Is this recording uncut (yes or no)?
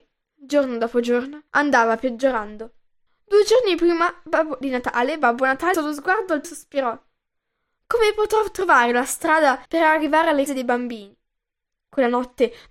no